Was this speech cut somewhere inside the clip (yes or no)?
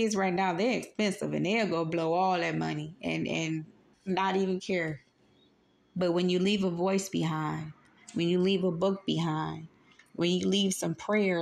yes